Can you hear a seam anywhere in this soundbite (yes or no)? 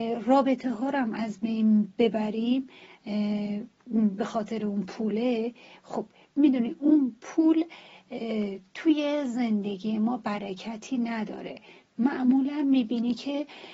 no